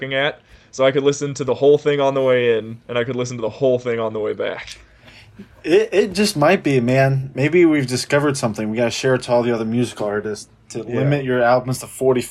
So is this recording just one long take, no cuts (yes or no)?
yes